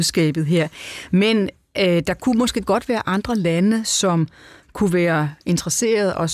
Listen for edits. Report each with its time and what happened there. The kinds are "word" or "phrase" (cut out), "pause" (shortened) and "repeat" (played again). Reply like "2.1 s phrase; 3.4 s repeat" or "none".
none